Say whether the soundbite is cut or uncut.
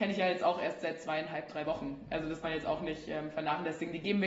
cut